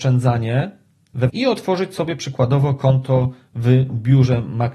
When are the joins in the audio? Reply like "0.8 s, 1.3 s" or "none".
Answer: 1.3 s